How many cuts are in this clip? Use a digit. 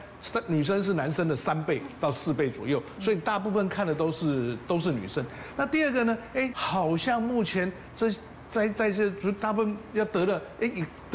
1